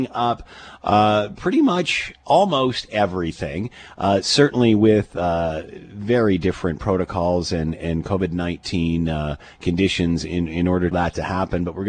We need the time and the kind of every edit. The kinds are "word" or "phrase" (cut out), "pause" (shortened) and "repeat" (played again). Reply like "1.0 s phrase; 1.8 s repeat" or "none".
10.9 s phrase